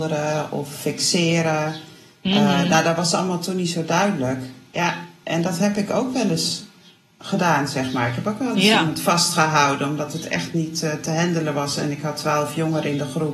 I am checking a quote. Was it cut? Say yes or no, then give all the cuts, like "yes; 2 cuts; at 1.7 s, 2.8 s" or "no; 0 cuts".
no; 0 cuts